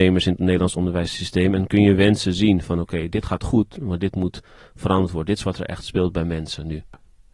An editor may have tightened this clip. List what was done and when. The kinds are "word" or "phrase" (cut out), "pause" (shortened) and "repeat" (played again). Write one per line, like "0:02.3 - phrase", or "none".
none